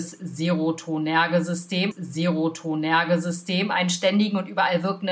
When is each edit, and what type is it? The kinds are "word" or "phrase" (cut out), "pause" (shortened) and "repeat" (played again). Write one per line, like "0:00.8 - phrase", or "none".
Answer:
0:01.9 - repeat